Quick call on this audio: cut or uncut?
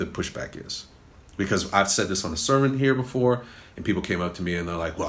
uncut